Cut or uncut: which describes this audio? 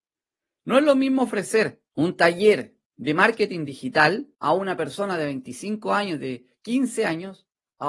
cut